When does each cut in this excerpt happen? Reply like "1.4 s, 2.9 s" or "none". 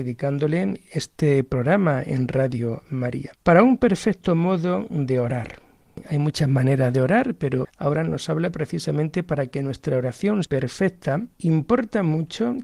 3.4 s, 7.6 s, 10.4 s, 11.3 s

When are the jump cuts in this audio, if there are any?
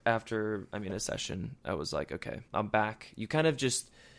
2.5 s

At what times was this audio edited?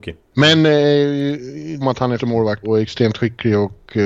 1.8 s, 2.2 s, 2.6 s

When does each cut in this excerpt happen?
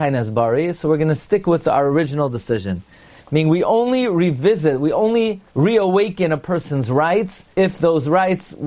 5.5 s, 7.5 s

